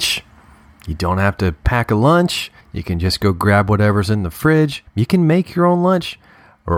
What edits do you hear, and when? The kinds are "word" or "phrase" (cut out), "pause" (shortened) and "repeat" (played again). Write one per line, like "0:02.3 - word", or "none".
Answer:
0:02.6 - pause
0:04.9 - pause